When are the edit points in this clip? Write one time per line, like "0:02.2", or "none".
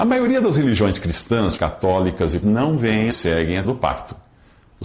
0:01.6
0:02.4
0:03.1
0:03.6